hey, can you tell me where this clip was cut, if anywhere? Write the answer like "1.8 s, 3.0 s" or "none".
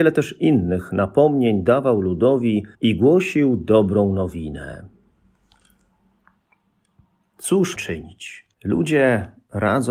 2.7 s, 7.8 s, 8.5 s